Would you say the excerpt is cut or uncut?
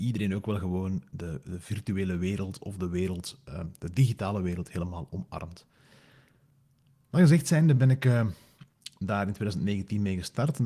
uncut